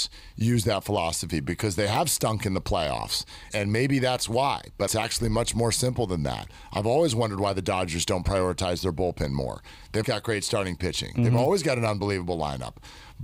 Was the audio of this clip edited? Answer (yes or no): yes